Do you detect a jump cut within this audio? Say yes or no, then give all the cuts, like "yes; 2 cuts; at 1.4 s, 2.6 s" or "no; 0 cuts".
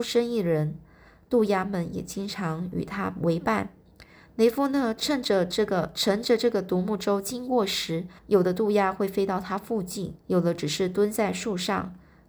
yes; 2 cuts; at 8.2 s, 10.2 s